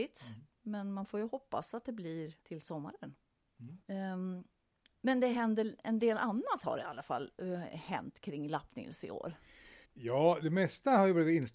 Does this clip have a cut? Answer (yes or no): yes